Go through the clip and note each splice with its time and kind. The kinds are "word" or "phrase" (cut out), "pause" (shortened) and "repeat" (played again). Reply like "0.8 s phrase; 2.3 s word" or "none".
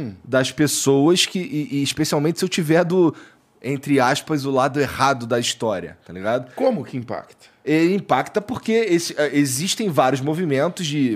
none